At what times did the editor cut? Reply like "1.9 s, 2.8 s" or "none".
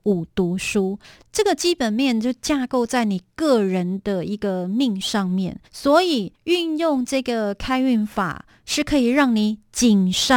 1.0 s, 5.7 s, 6.4 s